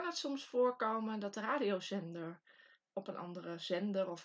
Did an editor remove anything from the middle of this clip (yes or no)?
yes